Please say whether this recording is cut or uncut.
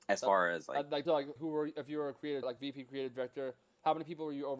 cut